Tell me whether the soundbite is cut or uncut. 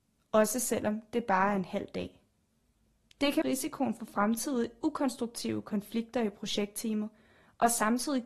cut